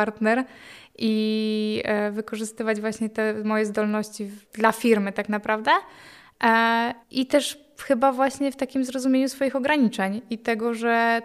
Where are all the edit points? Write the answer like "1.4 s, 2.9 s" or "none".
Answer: 4.4 s, 7.0 s

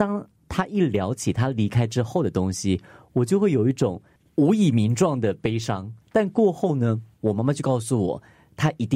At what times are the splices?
6.0 s, 7.1 s

